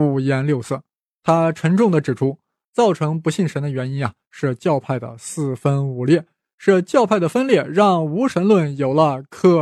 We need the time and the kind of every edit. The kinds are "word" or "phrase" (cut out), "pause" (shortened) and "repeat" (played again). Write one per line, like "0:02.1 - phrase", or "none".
none